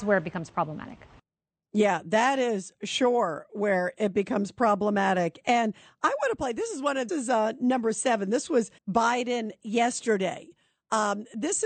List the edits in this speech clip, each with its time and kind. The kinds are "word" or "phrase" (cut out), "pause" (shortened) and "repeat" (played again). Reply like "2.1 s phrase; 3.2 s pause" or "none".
7.1 s phrase; 8.8 s pause